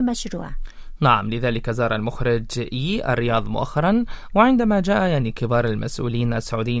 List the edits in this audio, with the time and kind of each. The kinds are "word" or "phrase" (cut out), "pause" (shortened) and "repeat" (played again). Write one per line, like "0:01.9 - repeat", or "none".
none